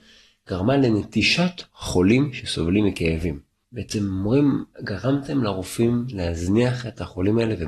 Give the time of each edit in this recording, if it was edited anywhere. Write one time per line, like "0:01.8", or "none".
0:01.7